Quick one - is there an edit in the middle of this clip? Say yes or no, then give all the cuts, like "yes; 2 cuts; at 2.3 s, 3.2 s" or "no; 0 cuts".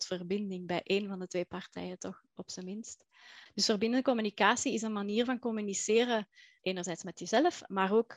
no; 0 cuts